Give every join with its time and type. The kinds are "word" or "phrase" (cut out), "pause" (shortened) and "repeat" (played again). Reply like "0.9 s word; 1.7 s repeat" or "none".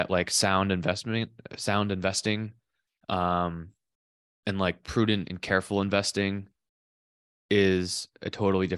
none